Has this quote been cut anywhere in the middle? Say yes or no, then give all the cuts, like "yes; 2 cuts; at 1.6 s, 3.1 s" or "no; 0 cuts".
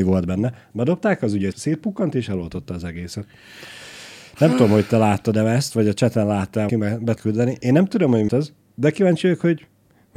yes; 4 cuts; at 1.5 s, 6.7 s, 7.2 s, 8.3 s